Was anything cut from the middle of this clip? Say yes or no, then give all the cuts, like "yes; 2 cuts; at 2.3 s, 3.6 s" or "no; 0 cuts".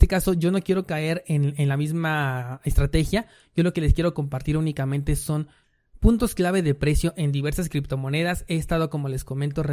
no; 0 cuts